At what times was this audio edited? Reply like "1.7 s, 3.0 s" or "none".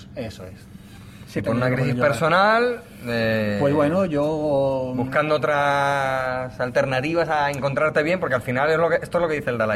none